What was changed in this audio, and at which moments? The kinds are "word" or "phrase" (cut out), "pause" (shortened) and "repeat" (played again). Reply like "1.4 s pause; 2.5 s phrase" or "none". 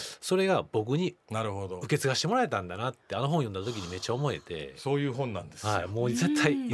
1.2 s pause